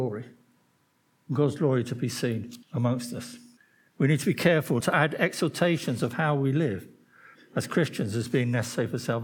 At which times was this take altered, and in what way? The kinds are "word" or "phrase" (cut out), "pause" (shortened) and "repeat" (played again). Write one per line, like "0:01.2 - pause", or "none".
0:02.6 - pause
0:03.6 - pause
0:04.8 - word
0:07.4 - word